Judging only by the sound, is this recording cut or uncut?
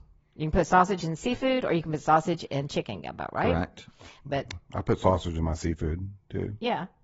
uncut